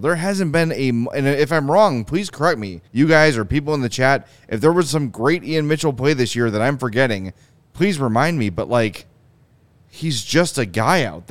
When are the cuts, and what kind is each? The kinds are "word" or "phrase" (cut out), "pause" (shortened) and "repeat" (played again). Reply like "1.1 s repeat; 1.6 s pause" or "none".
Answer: 2.9 s pause